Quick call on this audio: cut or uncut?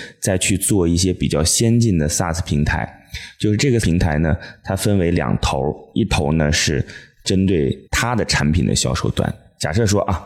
cut